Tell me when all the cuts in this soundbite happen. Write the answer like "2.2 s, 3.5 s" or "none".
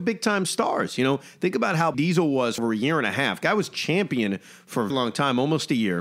1.9 s, 2.6 s, 4.9 s